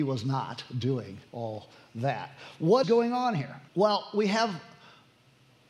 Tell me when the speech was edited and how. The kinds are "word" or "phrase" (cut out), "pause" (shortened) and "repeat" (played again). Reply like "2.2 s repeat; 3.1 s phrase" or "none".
1.3 s pause; 2.8 s word; 3.7 s pause